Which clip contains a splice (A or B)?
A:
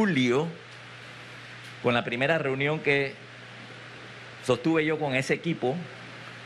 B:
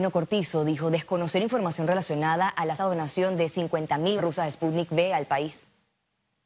B